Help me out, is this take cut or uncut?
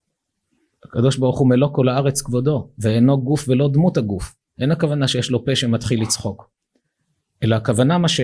uncut